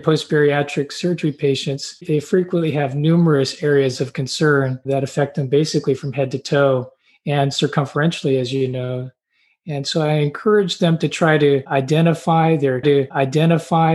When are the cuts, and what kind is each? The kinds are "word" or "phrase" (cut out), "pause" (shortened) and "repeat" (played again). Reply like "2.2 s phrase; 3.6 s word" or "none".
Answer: 12.8 s repeat